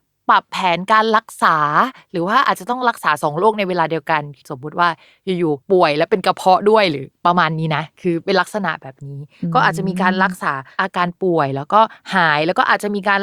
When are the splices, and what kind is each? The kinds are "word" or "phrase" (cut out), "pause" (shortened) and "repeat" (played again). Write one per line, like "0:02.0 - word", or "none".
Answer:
0:04.4 - phrase
0:05.6 - pause